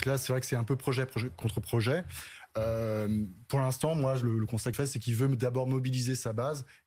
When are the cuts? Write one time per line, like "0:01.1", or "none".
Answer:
0:04.7